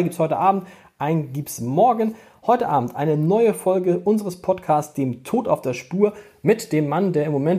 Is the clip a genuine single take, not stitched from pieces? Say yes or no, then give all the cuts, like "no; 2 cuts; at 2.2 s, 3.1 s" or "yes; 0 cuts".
yes; 0 cuts